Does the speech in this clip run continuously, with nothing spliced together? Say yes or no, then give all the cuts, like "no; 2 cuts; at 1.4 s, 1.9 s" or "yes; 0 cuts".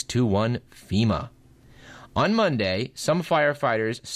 yes; 0 cuts